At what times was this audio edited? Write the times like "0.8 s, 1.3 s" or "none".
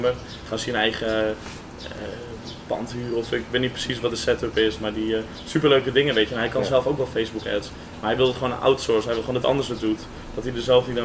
9.4 s